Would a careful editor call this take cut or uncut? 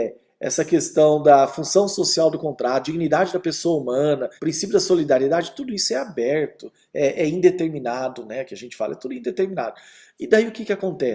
cut